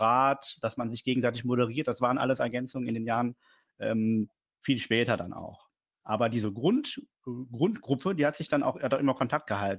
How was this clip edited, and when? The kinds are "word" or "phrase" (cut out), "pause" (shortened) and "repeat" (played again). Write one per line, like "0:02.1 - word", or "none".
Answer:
none

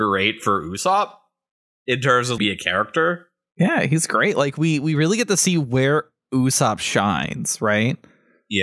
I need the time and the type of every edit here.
0:02.4 - phrase

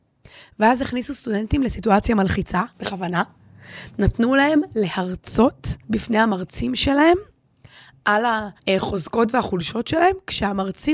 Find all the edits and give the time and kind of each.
0:02.7 - pause
0:05.8 - pause
0:08.6 - pause

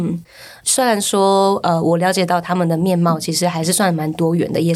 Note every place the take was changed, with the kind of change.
none

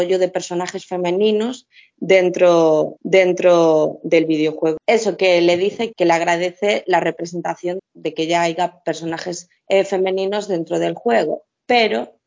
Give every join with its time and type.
0:03.0 - repeat
0:05.9 - word
0:07.8 - word
0:09.6 - pause

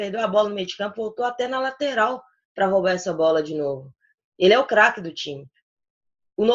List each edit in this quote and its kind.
none

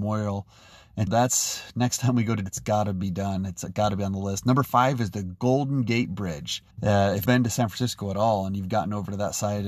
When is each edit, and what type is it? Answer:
0:01.1 - word
0:02.5 - word
0:06.7 - pause
0:07.3 - word

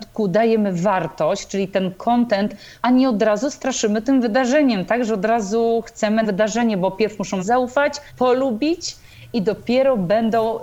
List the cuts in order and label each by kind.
0:02.8 - phrase
0:06.2 - word
0:07.4 - word
0:08.1 - pause

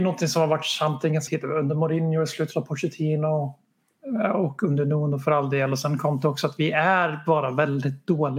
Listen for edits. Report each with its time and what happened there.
0:01.3 - word

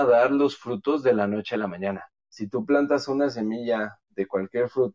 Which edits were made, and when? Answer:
0:02.2 - pause

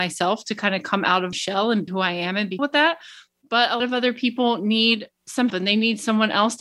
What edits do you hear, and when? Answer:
0:01.3 - word
0:01.9 - word
0:02.6 - word
0:03.8 - word
0:05.5 - word

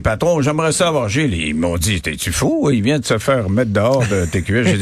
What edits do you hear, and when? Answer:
none

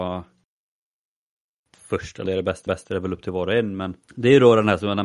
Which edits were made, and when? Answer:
0:01.7 - word
0:02.3 - word
0:02.7 - repeat
0:04.0 - pause

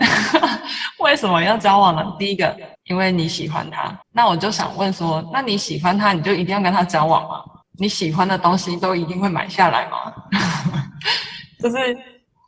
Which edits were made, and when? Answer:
0:02.7 - pause
0:04.0 - pause
0:07.6 - pause

